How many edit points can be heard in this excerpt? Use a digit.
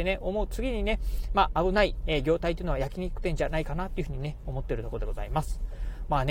0